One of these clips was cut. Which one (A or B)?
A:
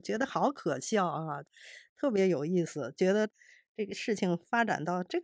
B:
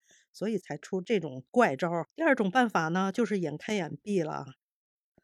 B